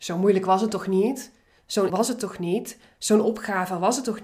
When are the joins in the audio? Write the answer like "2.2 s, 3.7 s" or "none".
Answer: 1.9 s